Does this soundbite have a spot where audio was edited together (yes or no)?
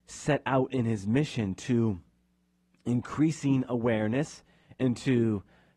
no